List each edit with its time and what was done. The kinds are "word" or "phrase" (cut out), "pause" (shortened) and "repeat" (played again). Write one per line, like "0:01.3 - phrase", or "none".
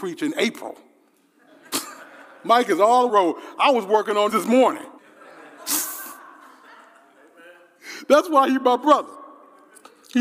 0:03.1 - phrase
0:04.3 - word
0:05.0 - pause